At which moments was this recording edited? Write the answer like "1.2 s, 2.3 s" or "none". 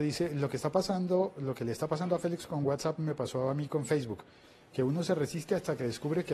none